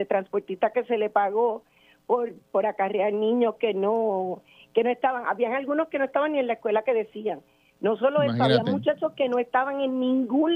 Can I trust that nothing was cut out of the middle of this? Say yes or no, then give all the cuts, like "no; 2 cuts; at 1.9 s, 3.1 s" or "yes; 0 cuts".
yes; 0 cuts